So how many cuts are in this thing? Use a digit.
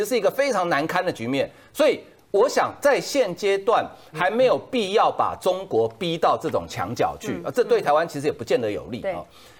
0